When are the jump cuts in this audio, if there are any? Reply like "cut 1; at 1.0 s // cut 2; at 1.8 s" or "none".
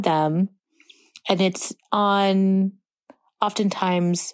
none